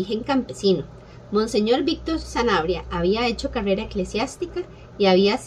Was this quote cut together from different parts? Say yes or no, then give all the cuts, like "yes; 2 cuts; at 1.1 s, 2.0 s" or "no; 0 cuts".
no; 0 cuts